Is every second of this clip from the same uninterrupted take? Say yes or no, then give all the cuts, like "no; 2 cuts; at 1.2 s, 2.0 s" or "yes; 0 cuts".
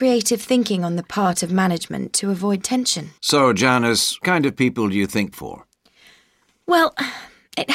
no; 3 cuts; at 3.2 s, 4.2 s, 5.3 s